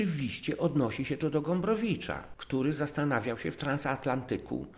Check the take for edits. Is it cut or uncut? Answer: uncut